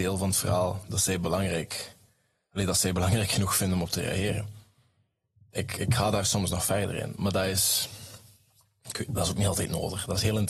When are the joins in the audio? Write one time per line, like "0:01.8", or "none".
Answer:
none